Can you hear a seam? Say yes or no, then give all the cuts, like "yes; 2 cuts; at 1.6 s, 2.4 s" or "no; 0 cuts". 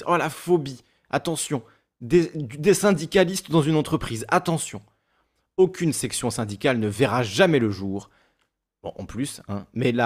no; 0 cuts